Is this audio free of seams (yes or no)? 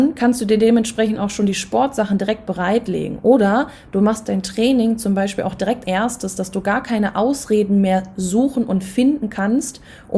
no